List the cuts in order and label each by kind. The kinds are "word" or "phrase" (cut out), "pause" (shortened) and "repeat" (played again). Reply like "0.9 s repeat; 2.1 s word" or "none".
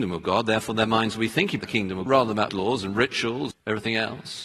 1.6 s word; 2.1 s word; 2.5 s word; 3.5 s word